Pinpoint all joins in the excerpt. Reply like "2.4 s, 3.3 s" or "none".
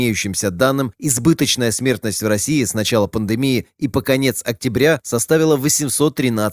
none